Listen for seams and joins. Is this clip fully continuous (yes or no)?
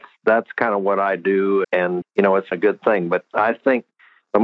no